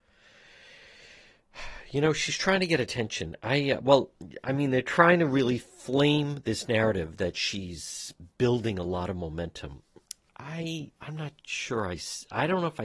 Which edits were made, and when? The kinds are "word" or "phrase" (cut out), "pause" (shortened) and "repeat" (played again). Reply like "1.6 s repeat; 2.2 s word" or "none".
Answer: 5.7 s pause; 10.9 s pause; 11.4 s pause